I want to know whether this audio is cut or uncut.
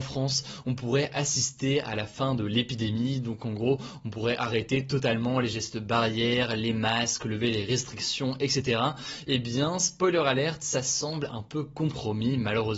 uncut